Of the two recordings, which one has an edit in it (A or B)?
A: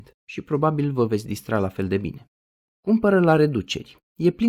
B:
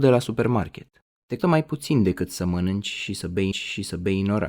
B